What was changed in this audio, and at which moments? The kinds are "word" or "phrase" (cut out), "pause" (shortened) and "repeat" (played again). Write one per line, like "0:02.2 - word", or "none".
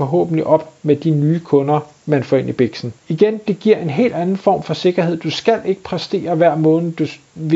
0:03.0 - pause